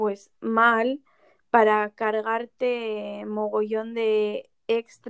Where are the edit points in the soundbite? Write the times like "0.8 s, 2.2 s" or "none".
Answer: none